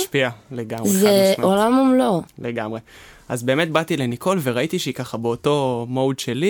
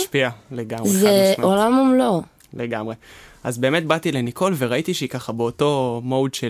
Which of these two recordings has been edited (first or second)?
first